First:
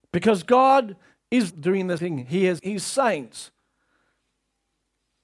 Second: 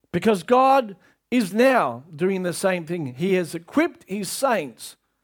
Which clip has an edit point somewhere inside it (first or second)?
first